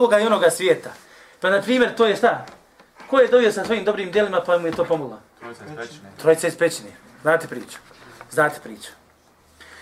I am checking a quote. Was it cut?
no; 0 cuts

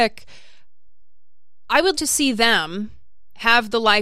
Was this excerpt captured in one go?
no; 1 cut; at 1.9 s

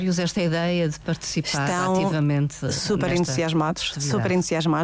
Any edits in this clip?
no; 0 cuts

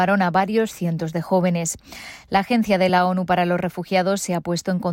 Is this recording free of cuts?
yes; 0 cuts

